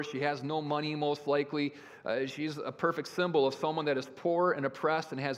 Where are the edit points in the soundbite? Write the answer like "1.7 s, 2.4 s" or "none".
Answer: none